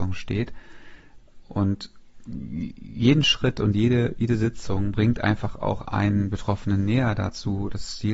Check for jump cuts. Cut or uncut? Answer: uncut